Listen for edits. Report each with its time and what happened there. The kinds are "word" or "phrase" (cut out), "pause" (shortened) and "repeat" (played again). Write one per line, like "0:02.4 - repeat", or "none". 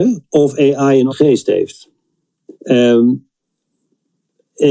0:01.1 - word
0:02.5 - pause